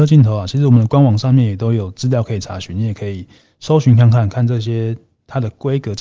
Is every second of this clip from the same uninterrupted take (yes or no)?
yes